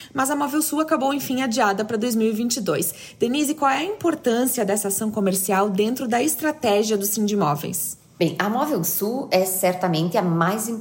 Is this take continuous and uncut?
yes; 0 cuts

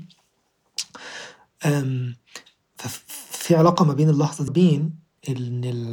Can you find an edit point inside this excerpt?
yes; 1 cut; at 4.5 s

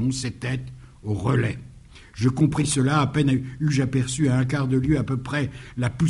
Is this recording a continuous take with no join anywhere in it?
yes; 0 cuts

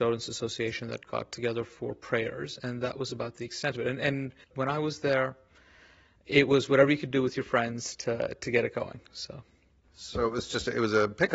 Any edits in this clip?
yes; 1 cut; at 4.4 s

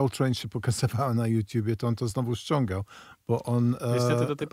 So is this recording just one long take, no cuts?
yes; 0 cuts

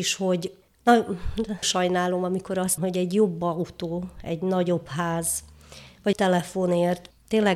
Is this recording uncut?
no; 3 cuts; at 1.6 s, 2.8 s, 6.1 s

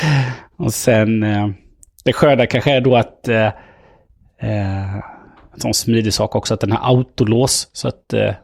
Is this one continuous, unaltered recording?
yes; 0 cuts

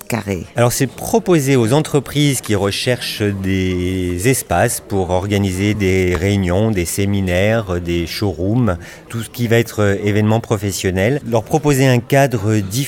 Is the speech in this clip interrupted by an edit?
no; 0 cuts

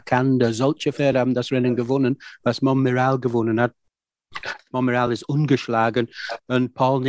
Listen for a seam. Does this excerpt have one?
no; 0 cuts

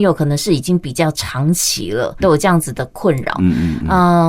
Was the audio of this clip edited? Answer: yes; 1 cut; at 2.2 s

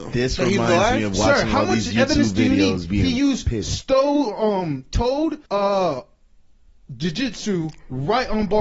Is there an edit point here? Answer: yes; 1 cut; at 5.5 s

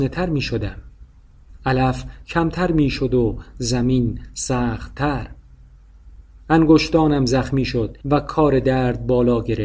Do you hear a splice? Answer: yes; 1 cut; at 8.0 s

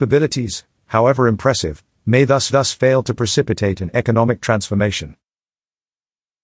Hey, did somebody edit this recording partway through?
yes; 1 cut; at 2.5 s

